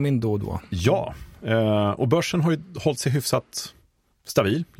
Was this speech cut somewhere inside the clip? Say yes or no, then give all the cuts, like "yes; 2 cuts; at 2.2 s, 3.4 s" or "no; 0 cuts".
no; 0 cuts